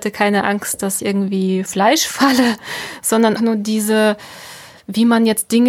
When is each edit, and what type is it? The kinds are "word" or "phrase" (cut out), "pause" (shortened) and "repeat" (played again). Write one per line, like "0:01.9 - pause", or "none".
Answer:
0:01.0 - word
0:01.7 - word
0:03.4 - word